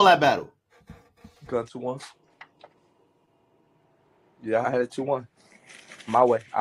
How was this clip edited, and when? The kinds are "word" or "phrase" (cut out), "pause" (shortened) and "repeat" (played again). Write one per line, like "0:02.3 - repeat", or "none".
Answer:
0:01.7 - word
0:04.6 - word